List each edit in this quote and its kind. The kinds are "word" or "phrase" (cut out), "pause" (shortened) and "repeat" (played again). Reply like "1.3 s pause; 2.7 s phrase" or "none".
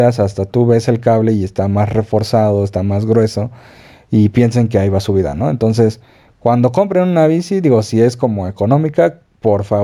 none